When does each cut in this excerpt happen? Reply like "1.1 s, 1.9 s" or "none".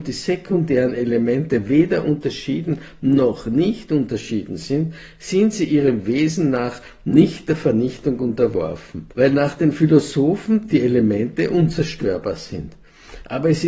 9.1 s